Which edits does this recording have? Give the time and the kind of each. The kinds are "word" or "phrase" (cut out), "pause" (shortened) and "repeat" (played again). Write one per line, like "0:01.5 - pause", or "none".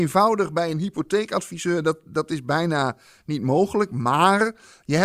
none